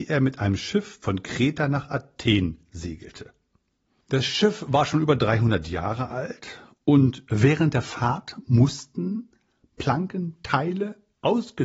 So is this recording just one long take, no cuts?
yes; 0 cuts

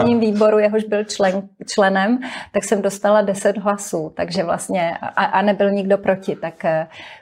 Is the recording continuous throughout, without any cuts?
yes; 0 cuts

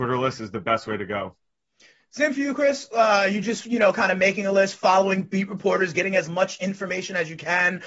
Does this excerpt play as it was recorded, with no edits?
yes; 0 cuts

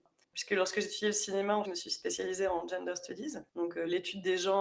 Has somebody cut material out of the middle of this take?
yes; 2 cuts; at 1.6 s, 3.5 s

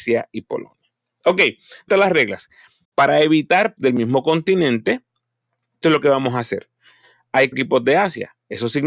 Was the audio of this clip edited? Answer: yes; 4 cuts; at 1.9 s, 3.8 s, 5.8 s, 7.5 s

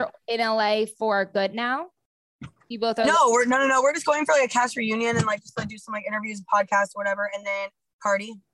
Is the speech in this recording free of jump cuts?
yes; 0 cuts

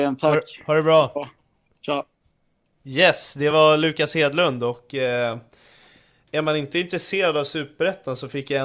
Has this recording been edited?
no; 0 cuts

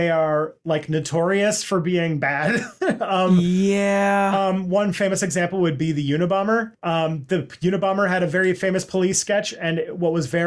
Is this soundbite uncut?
yes; 0 cuts

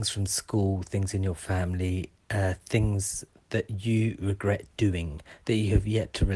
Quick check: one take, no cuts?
yes; 0 cuts

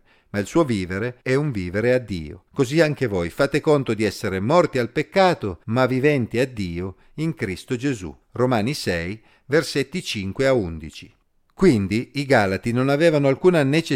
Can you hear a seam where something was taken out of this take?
yes; 4 cuts; at 1.2 s, 2.5 s, 5.6 s, 8.2 s

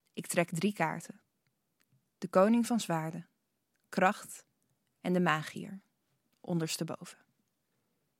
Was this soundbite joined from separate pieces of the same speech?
no; 0 cuts

